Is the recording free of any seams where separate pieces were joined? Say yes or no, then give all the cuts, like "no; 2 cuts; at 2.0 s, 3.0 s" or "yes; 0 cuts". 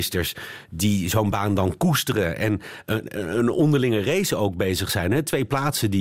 yes; 0 cuts